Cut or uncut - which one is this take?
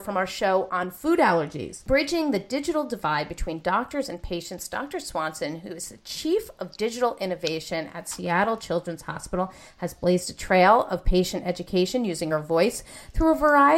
uncut